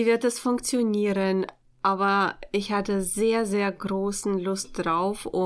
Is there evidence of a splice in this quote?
no; 0 cuts

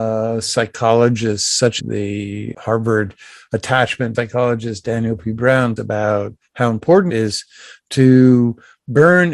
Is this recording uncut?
no; 5 cuts; at 1.8 s, 2.5 s, 4.1 s, 5.8 s, 7.1 s

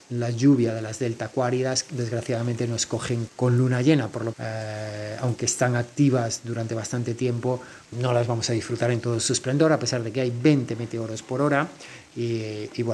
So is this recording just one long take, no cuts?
no; 4 cuts; at 1.9 s, 3.3 s, 4.3 s, 7.9 s

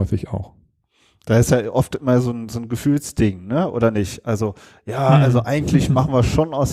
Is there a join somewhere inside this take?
no; 0 cuts

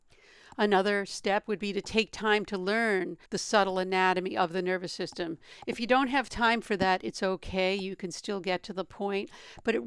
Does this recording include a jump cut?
yes; 1 cut; at 3.2 s

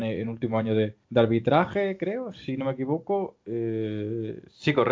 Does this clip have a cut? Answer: yes; 1 cut; at 1.0 s

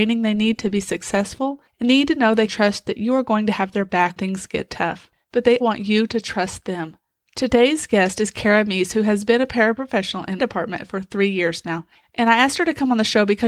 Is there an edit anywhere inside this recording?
yes; 5 cuts; at 1.8 s, 2.5 s, 4.2 s, 5.6 s, 10.4 s

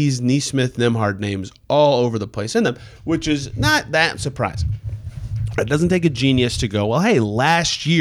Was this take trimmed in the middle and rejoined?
no; 0 cuts

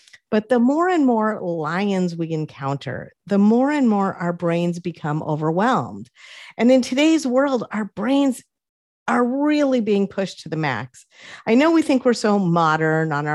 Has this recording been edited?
no; 0 cuts

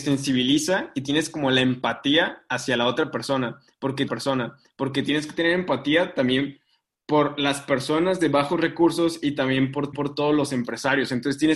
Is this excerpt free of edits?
no; 2 cuts; at 4.1 s, 9.9 s

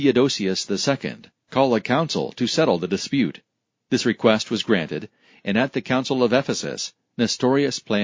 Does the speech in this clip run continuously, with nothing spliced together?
yes; 0 cuts

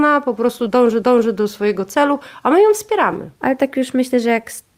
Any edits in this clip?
yes; 2 cuts; at 1.0 s, 3.4 s

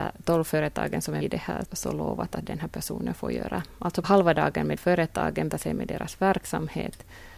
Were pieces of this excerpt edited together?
yes; 5 cuts; at 1.2 s, 1.6 s, 4.0 s, 4.8 s, 5.5 s

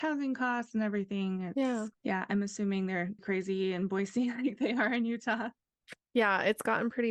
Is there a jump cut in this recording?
yes; 2 cuts; at 1.9 s, 3.2 s

